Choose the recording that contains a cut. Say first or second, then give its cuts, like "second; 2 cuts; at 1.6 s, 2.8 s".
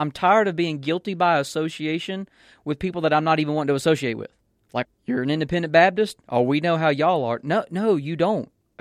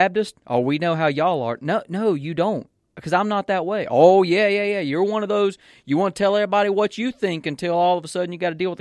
first; 1 cut; at 4.8 s